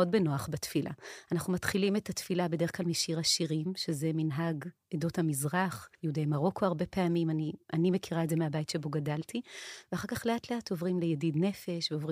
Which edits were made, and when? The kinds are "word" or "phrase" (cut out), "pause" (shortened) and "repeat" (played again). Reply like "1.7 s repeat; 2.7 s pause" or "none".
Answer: 5.9 s pause